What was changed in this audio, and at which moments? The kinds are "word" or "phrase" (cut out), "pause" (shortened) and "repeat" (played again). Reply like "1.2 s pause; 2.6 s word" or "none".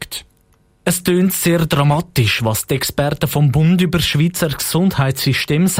none